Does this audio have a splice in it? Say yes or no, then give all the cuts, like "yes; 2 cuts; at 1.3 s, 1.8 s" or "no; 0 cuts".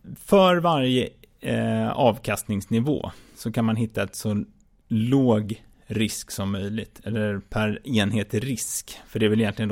no; 0 cuts